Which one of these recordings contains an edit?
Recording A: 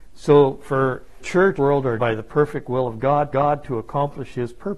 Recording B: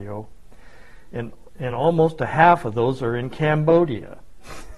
A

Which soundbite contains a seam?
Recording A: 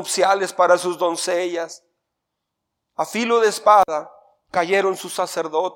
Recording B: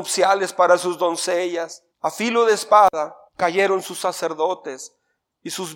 B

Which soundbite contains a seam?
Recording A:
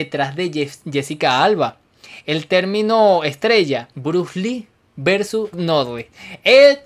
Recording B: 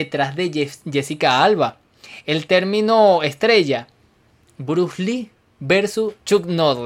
A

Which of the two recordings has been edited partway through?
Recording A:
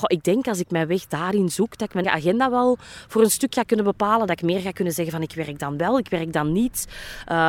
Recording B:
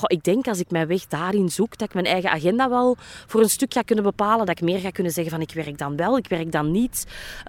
A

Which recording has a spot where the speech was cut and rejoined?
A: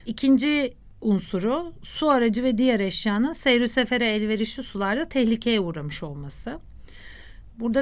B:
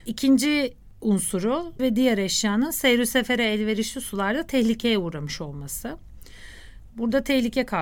B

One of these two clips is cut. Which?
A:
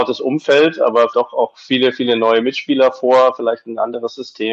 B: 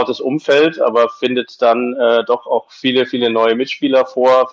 A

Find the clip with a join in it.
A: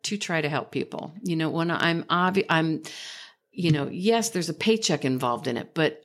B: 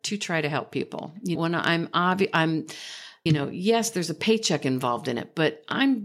B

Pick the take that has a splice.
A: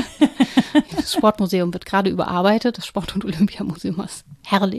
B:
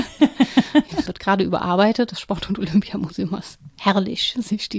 B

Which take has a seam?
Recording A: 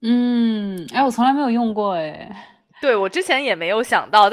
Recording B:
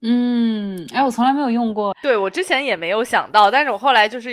B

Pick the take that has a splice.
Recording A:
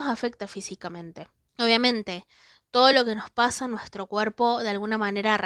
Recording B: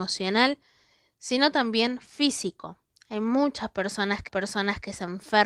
B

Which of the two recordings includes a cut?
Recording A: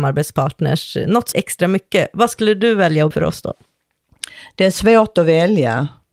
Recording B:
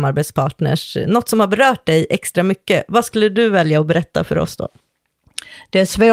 A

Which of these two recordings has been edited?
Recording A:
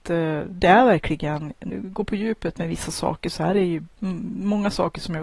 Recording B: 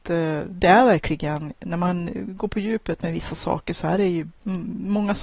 A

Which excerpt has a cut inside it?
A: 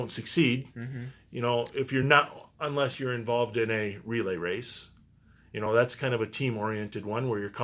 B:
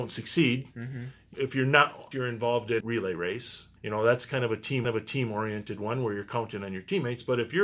B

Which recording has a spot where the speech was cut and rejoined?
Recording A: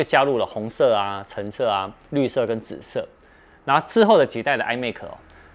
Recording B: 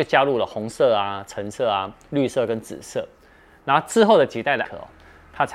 B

